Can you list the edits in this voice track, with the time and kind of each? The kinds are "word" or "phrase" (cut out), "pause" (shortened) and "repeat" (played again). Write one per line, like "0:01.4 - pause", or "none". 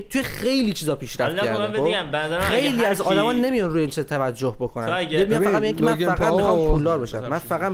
none